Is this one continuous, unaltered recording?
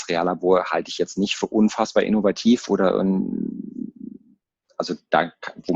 yes; 0 cuts

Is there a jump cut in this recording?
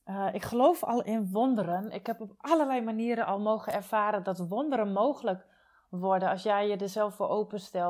no; 0 cuts

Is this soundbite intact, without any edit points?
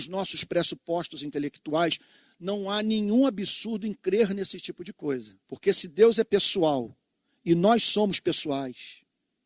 no; 1 cut; at 5.4 s

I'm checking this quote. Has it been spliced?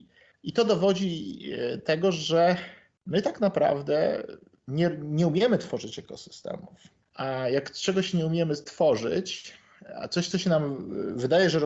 no; 0 cuts

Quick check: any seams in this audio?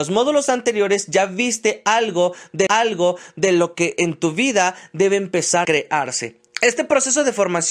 yes; 2 cuts; at 2.7 s, 5.6 s

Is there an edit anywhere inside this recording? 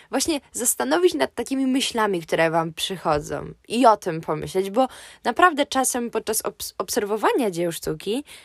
no; 0 cuts

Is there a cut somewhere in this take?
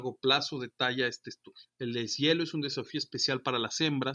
yes; 1 cut; at 1.7 s

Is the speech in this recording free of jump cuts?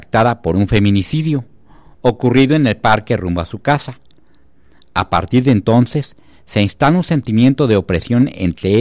yes; 0 cuts

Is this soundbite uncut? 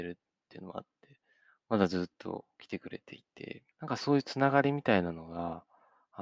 no; 1 cut; at 3.7 s

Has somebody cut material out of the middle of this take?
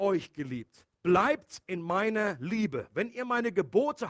yes; 1 cut; at 0.9 s

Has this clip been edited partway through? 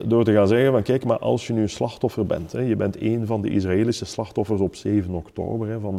no; 0 cuts

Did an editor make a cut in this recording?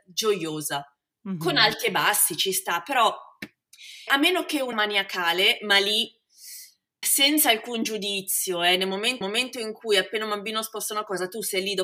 yes; 4 cuts; at 4.1 s, 4.7 s, 7.0 s, 9.2 s

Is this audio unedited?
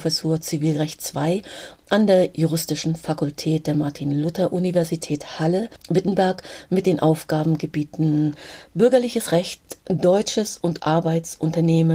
no; 1 cut; at 10.8 s

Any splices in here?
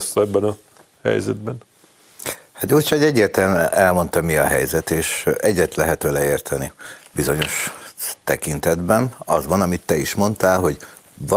no; 0 cuts

